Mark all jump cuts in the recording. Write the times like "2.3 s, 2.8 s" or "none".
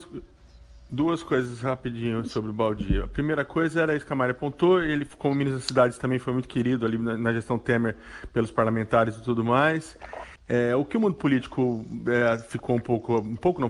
10.4 s